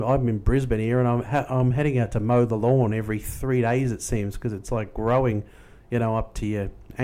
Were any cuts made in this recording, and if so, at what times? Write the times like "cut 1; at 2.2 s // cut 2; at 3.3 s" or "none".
none